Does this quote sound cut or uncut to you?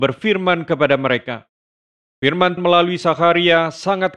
cut